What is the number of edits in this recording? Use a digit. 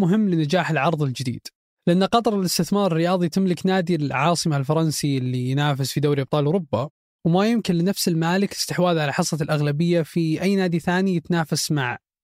0